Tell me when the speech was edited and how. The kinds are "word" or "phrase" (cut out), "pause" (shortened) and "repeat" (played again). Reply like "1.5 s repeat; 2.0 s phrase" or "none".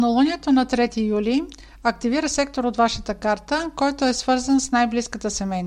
none